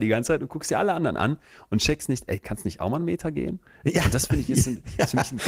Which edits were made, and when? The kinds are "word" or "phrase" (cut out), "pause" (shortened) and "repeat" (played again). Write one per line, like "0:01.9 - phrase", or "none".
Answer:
none